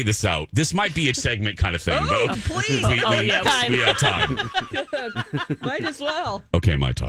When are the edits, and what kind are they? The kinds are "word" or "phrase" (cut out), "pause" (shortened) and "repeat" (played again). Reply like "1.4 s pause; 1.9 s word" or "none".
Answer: 1.1 s word; 2.3 s word; 2.8 s word; 3.4 s word

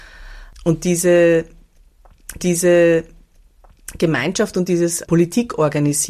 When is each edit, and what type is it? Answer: 2.4 s repeat; 5.0 s word

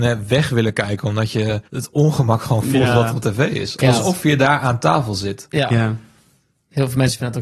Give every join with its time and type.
1.6 s pause

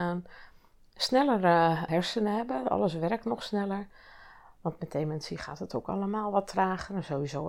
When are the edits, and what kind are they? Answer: none

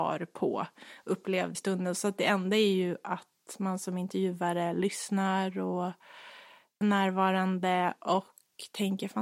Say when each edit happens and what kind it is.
1.5 s phrase; 6.8 s word

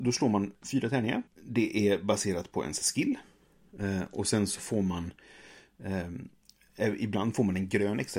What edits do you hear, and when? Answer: 1.3 s pause

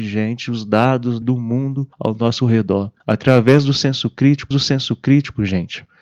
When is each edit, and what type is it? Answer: 1.2 s word; 1.9 s pause; 3.0 s pause; 4.5 s repeat

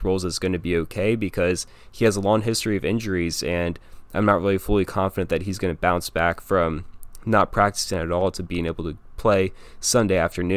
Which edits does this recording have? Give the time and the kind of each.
none

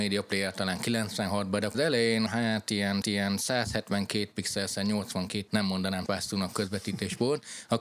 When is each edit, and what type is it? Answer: 1.7 s phrase; 3.0 s repeat; 5.5 s word; 6.1 s word

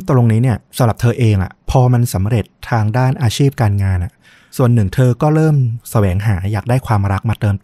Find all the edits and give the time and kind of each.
1.6 s pause

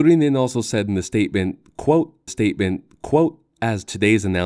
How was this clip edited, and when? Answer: 2.3 s repeat

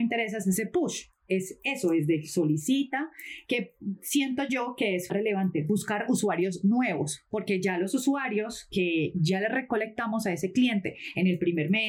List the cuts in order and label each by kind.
5.1 s phrase; 9.1 s word

